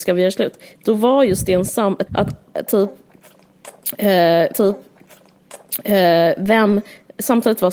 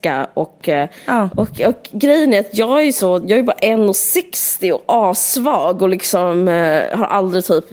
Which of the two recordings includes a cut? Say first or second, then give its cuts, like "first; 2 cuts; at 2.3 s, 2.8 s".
first; 2 cuts; at 2.1 s, 4.5 s